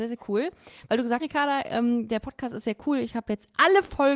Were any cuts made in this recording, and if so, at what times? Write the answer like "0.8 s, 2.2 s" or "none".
1.2 s